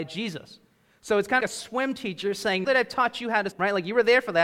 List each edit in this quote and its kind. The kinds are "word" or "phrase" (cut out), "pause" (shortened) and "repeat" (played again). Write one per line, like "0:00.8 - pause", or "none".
0:01.4 - phrase
0:02.6 - word
0:03.5 - word

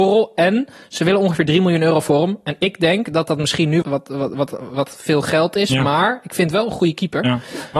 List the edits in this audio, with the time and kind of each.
0:03.8 - word

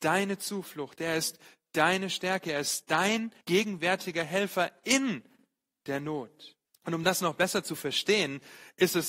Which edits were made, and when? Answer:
0:03.4 - pause
0:06.6 - pause

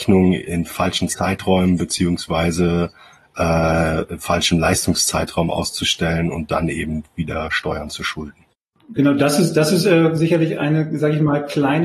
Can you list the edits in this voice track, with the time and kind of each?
none

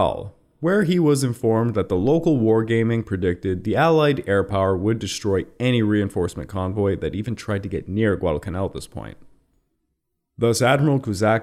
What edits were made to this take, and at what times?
none

